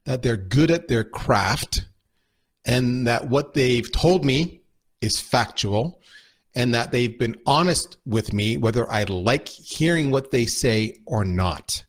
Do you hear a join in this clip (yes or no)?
no